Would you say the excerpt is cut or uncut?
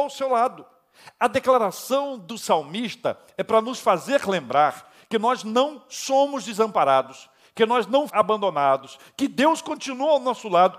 cut